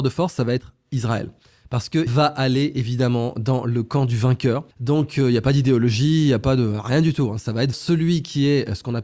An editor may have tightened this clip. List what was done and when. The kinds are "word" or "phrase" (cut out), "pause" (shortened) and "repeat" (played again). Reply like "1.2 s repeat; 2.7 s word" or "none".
2.1 s word; 4.7 s pause; 7.7 s word